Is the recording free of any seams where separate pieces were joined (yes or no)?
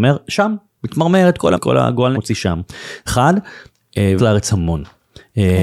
no